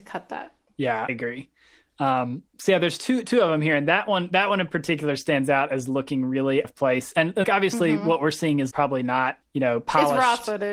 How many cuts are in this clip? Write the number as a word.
six